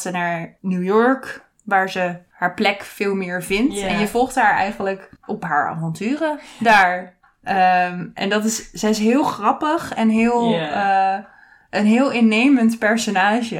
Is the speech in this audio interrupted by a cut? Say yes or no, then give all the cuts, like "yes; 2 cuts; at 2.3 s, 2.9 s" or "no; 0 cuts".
no; 0 cuts